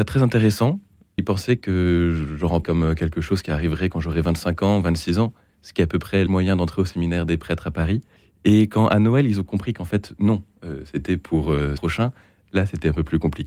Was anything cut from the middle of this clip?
yes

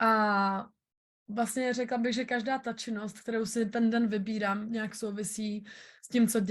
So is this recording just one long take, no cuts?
yes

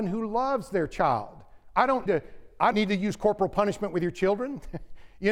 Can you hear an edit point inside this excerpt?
yes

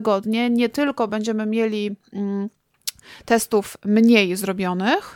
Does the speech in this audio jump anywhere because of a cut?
no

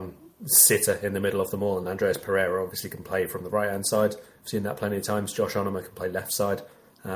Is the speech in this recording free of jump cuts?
yes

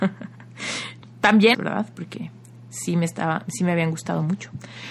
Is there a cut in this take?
yes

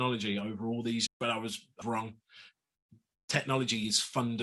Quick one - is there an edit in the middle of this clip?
yes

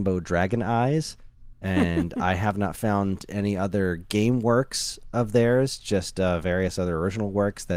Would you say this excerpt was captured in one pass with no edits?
yes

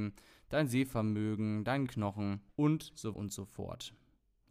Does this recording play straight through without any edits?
no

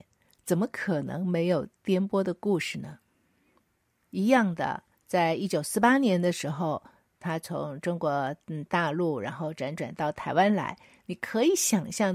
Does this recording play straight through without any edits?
yes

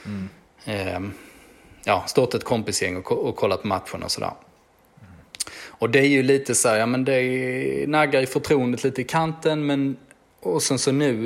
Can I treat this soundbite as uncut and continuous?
yes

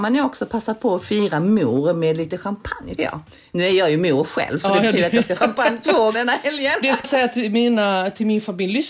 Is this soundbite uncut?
no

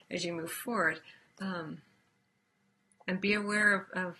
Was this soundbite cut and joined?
no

